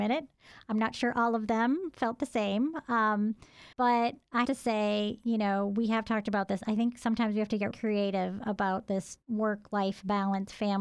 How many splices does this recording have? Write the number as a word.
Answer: four